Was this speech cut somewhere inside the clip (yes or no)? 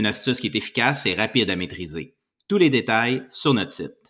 no